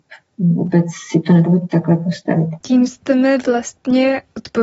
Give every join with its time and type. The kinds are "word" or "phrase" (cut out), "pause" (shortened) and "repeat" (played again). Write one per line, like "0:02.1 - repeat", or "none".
0:02.6 - pause

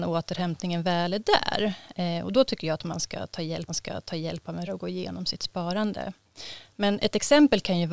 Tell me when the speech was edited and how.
0:03.7 - repeat
0:04.7 - word

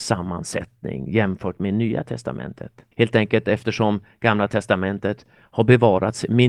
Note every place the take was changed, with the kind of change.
0:02.9 - pause

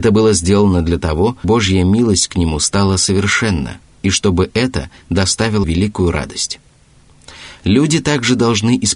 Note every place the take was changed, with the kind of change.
0:01.4 - word
0:05.6 - word

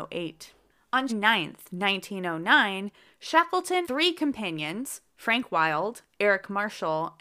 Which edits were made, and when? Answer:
0:01.1 - word
0:03.8 - word

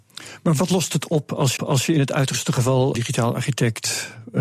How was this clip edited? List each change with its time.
0:01.6 - repeat
0:02.9 - word

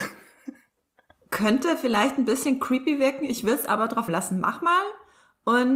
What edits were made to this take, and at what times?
0:04.1 - word

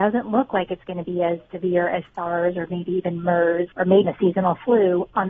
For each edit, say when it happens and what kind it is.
0:03.7 - pause
0:04.0 - word

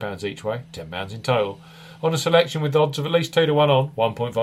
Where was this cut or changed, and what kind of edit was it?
none

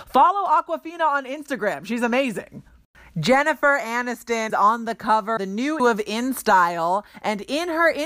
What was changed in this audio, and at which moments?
0:04.5 - word
0:05.4 - word
0:05.8 - word

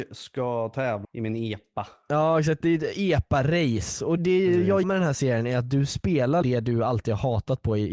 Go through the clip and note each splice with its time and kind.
0:01.0 - word
0:04.2 - word
0:04.8 - word
0:06.4 - word

